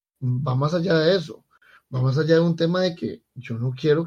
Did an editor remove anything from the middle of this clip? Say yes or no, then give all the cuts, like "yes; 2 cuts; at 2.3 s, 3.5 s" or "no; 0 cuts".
no; 0 cuts